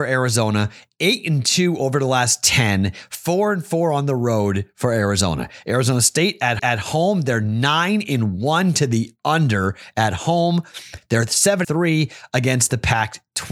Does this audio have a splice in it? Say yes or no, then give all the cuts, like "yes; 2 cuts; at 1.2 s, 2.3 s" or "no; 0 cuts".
yes; 2 cuts; at 6.6 s, 11.6 s